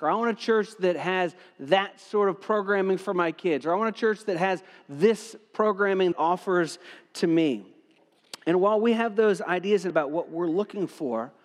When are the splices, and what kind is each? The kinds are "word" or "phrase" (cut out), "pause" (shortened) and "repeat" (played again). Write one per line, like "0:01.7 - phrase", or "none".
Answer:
0:06.1 - word
0:09.9 - word